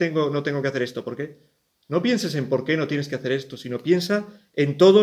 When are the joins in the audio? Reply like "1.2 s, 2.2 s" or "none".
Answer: none